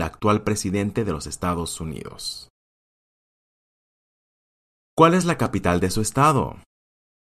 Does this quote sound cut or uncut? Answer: uncut